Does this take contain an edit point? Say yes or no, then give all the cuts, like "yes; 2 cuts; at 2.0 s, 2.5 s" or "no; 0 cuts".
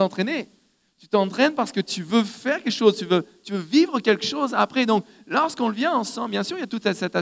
no; 0 cuts